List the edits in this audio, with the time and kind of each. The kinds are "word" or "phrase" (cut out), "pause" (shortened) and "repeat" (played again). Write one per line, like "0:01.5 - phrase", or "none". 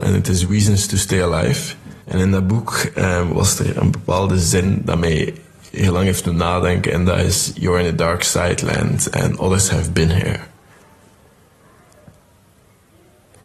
0:02.0 - pause